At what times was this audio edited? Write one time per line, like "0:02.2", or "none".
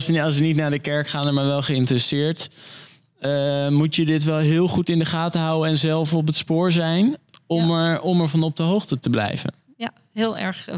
none